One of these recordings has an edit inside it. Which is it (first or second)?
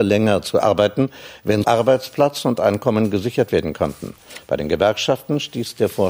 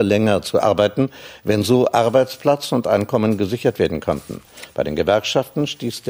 first